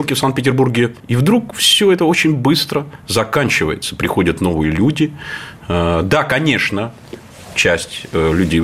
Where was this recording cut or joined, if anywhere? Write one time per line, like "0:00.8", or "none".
0:01.0